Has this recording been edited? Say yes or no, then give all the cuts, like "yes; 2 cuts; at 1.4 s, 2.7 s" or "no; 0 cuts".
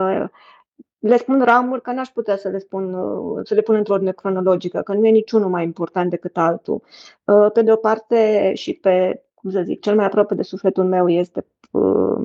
no; 0 cuts